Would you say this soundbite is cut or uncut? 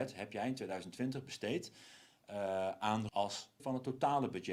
cut